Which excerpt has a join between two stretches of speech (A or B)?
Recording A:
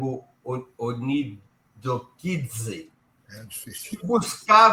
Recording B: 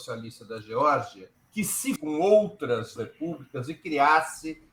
B